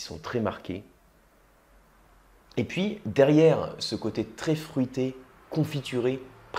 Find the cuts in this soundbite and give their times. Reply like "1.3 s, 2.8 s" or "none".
none